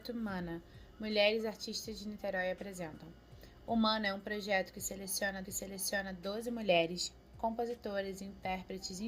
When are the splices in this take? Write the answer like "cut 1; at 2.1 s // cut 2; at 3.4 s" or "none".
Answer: cut 1; at 5.4 s